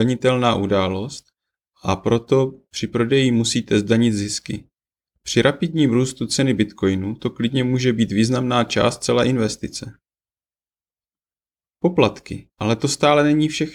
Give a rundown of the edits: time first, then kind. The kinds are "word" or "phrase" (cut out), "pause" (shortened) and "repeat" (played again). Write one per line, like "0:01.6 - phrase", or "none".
0:12.5 - pause